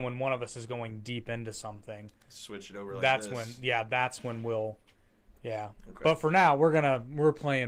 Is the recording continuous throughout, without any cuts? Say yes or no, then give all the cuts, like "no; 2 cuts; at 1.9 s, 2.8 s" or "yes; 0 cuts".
yes; 0 cuts